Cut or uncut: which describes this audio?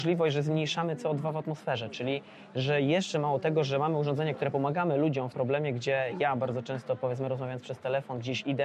cut